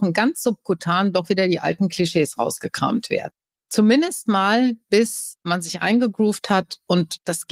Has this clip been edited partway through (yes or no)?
no